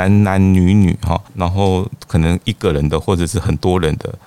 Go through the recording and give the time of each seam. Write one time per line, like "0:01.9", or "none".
0:01.3